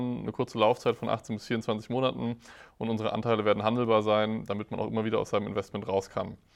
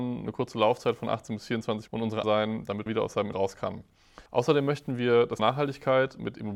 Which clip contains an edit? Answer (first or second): second